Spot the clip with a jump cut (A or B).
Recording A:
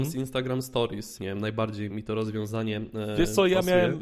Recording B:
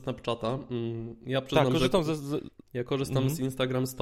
A